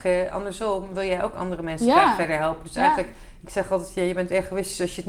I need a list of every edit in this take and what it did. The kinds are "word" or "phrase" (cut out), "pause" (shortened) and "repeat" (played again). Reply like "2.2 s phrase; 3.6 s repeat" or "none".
none